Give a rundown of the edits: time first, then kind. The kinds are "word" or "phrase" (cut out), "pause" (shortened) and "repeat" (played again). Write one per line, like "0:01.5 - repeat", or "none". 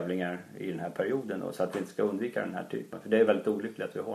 0:02.9 - word